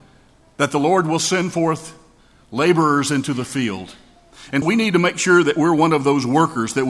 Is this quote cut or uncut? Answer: cut